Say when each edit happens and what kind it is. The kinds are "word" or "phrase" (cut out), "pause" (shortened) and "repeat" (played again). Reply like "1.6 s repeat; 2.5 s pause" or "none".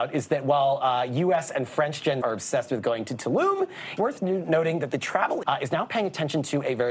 2.2 s word; 4.0 s word; 5.4 s word